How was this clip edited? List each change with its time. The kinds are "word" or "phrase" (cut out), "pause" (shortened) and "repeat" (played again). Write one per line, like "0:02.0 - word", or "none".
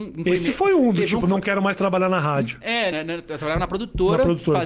0:02.9 - word